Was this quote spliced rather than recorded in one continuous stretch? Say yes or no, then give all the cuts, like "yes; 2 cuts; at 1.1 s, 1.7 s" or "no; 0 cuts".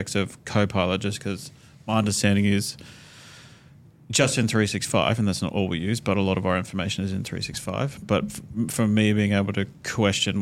no; 0 cuts